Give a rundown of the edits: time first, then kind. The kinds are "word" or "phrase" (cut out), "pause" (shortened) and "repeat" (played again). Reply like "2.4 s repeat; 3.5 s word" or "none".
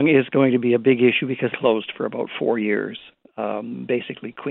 1.5 s phrase